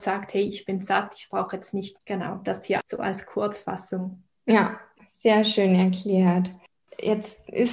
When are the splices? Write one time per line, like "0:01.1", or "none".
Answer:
0:02.0
0:02.8
0:04.4

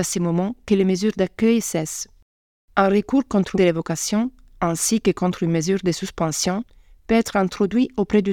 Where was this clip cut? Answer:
0:03.5

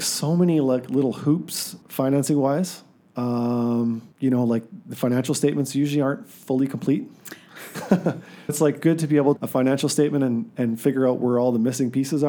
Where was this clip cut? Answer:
0:01.8
0:04.1
0:08.5
0:09.4

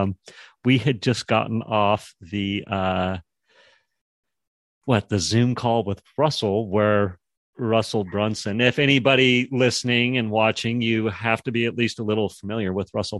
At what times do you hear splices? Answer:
none

